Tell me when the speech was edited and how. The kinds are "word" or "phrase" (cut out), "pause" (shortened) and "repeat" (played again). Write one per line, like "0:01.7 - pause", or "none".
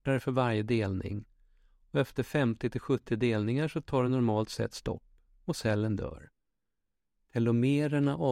none